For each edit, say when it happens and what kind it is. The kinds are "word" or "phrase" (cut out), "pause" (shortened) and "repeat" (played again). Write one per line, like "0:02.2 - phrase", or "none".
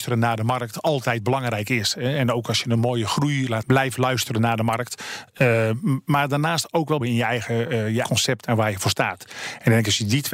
0:03.6 - word
0:07.0 - phrase
0:08.0 - word